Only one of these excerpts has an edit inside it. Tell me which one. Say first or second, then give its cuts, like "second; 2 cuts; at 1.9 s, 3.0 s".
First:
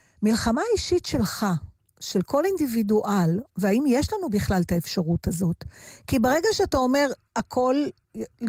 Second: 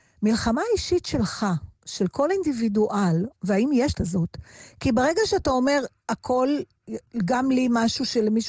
second; 2 cuts; at 1.8 s, 3.9 s